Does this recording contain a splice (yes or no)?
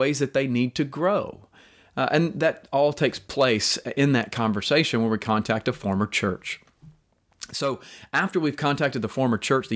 no